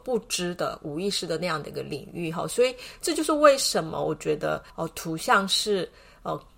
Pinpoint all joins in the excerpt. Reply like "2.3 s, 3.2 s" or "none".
4.7 s